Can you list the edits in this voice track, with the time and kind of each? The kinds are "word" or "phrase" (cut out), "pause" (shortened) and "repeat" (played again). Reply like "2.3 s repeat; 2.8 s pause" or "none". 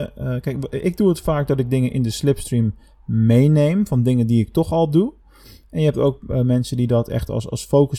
none